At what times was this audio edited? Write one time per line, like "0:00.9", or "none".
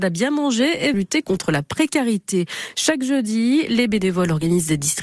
0:00.9